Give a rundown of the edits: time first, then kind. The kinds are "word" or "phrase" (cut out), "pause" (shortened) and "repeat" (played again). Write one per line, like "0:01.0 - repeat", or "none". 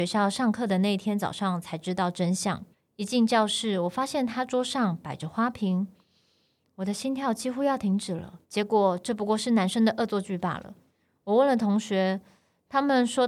0:02.7 - pause
0:08.4 - pause